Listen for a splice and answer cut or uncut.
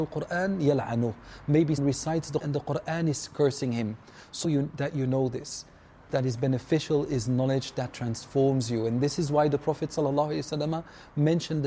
cut